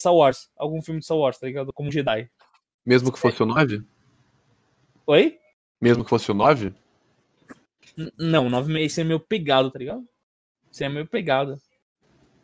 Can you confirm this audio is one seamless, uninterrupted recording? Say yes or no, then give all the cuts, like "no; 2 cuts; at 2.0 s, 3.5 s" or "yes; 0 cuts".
yes; 0 cuts